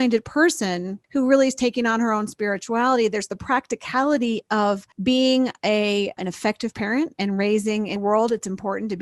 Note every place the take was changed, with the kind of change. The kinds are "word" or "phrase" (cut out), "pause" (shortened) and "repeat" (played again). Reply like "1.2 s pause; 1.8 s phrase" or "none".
1.0 s pause; 4.9 s pause; 6.2 s word; 8.0 s word